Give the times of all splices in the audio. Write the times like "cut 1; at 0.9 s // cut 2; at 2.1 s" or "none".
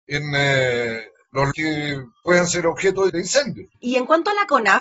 cut 1; at 1.5 s // cut 2; at 3.1 s // cut 3; at 3.7 s

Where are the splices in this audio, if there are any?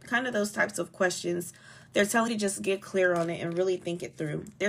cut 1; at 2.3 s

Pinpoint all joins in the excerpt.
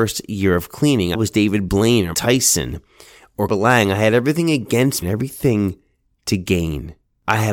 cut 1; at 1.1 s // cut 2; at 2.1 s // cut 3; at 3.5 s // cut 4; at 5.0 s

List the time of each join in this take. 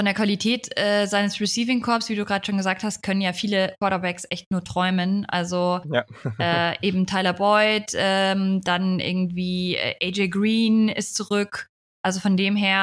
none

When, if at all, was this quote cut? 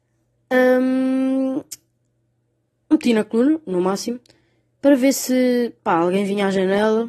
none

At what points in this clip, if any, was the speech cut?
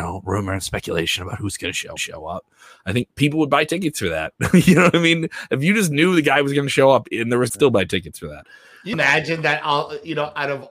cut 1; at 2.0 s // cut 2; at 7.5 s // cut 3; at 8.9 s

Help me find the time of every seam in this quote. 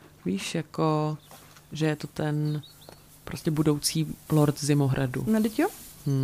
none

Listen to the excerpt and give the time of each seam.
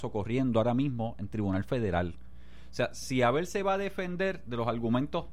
none

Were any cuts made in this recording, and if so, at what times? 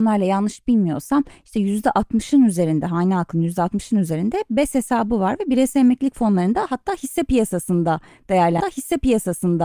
cut 1; at 8.6 s

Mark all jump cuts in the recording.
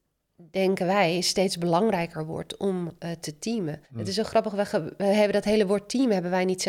cut 1; at 3.8 s

